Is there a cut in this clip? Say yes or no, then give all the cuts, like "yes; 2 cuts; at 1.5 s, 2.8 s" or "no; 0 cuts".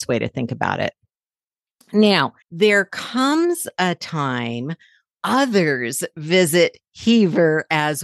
yes; 2 cuts; at 2.4 s, 5.1 s